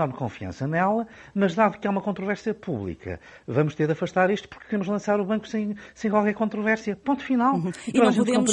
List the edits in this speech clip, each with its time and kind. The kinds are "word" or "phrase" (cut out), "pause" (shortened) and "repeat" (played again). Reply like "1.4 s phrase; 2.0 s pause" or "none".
none